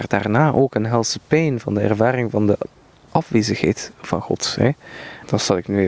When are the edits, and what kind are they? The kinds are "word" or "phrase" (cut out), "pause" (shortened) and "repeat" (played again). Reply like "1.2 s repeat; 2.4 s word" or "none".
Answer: none

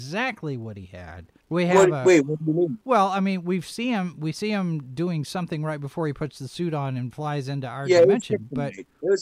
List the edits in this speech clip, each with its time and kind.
1.4 s pause; 2.8 s pause

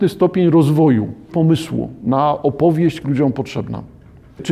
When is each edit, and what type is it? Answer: 1.3 s word; 3.0 s phrase

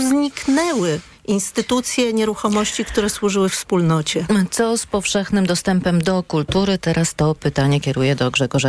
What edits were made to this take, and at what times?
none

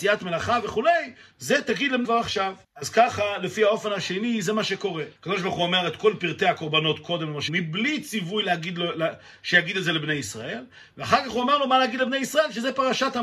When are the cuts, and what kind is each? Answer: 2.0 s word; 2.6 s pause; 5.2 s pause; 7.5 s word

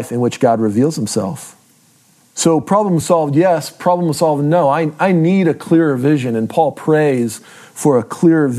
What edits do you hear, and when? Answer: none

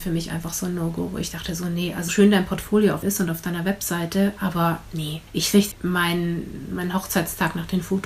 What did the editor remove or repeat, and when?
2.1 s word; 3.0 s word; 5.3 s pause; 5.7 s word

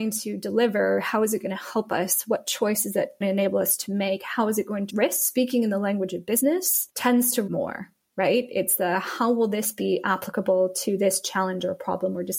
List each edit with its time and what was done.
3.2 s word; 4.9 s word; 7.5 s word

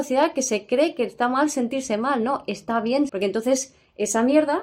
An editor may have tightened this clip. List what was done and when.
3.1 s phrase

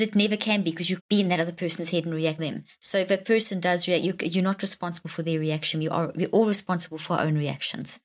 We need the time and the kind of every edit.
1.0 s word; 2.4 s word

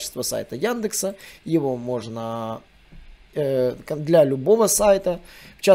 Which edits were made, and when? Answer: 3.3 s word

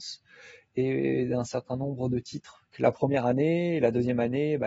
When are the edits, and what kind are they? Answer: none

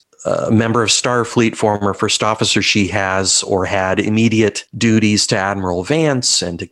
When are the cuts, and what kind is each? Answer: none

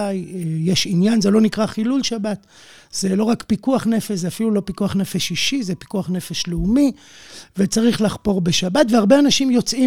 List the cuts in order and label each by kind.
none

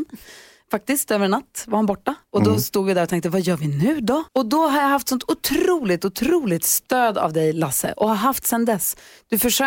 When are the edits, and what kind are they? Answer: 4.3 s pause

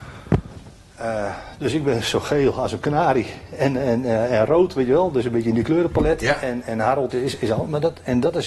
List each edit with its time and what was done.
7.1 s word

